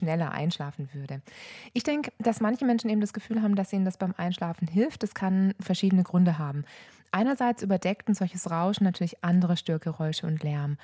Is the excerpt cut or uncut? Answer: uncut